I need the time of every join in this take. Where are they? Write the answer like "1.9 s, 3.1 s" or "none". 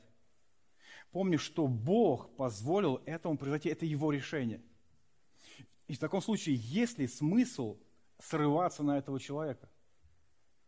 none